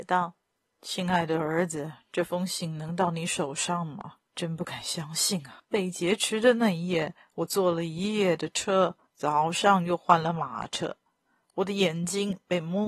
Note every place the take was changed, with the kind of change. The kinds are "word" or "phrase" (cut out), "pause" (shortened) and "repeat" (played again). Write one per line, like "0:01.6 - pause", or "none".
0:04.3 - pause
0:05.6 - pause
0:09.1 - pause